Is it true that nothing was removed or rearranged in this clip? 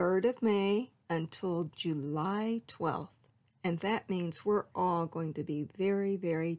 no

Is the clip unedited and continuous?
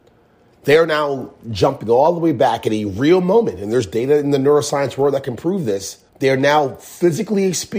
no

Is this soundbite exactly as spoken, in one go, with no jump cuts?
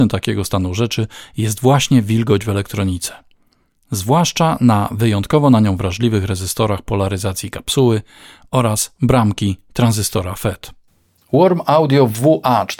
yes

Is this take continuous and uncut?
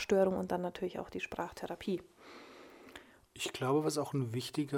yes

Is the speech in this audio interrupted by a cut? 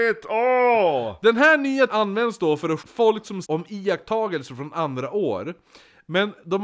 yes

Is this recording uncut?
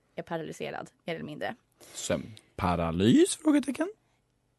yes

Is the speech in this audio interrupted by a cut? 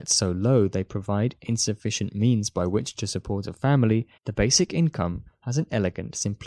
yes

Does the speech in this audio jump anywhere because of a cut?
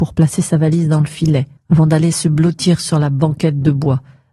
yes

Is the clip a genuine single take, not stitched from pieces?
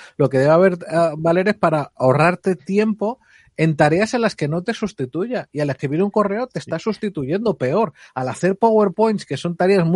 yes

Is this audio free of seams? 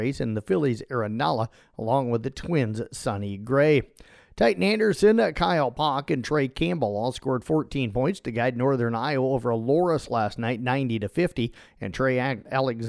yes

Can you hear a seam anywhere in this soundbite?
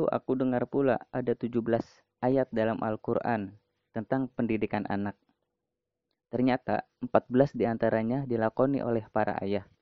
no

